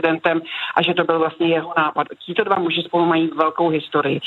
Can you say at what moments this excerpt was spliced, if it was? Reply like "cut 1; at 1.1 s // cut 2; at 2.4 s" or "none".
none